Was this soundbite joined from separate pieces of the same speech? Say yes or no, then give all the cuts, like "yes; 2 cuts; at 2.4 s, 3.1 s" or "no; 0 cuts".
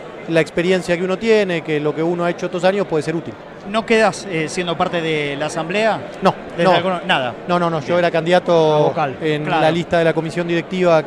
no; 0 cuts